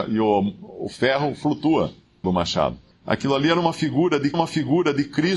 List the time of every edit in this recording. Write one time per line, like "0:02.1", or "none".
0:02.2
0:02.9
0:04.3